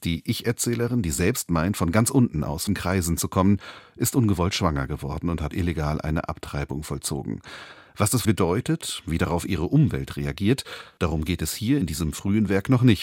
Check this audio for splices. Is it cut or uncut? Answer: cut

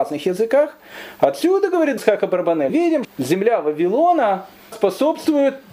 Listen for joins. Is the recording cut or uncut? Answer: cut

